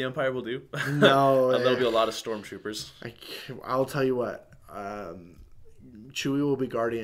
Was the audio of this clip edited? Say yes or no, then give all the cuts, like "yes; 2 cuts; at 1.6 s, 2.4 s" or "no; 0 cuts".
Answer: no; 0 cuts